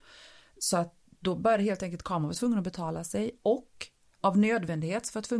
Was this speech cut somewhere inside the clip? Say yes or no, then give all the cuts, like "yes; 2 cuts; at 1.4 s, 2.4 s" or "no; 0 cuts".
no; 0 cuts